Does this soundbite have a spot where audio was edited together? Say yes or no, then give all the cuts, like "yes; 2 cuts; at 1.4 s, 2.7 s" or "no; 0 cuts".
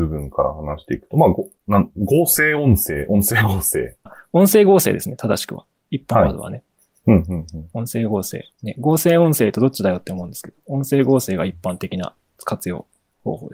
yes; 1 cut; at 8.5 s